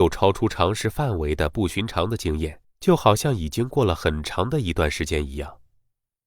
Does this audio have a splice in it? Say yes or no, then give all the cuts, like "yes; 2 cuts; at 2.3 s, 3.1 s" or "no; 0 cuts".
yes; 1 cut; at 2.6 s